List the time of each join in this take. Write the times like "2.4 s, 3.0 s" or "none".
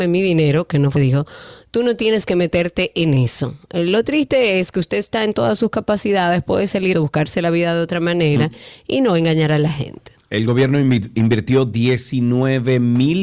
1.0 s, 6.9 s